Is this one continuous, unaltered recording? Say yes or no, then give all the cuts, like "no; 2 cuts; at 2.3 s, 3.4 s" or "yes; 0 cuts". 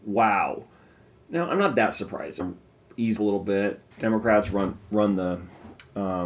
no; 3 cuts; at 2.4 s, 3.2 s, 3.9 s